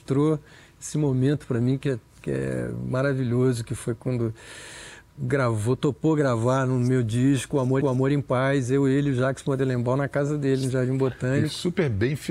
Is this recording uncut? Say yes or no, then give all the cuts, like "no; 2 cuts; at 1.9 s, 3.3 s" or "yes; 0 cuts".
no; 2 cuts; at 5.2 s, 7.8 s